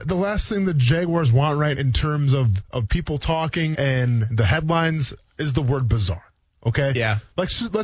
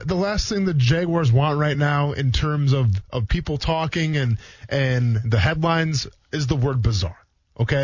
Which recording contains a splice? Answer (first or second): first